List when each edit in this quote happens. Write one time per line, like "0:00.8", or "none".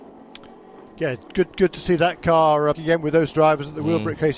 0:01.5
0:02.7
0:03.3